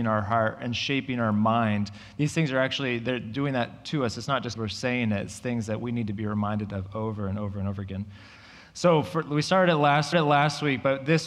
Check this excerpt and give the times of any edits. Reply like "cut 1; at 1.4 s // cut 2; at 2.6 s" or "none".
cut 1; at 4.6 s // cut 2; at 10.1 s